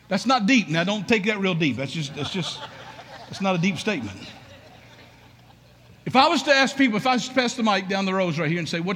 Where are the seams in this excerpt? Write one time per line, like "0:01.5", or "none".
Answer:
none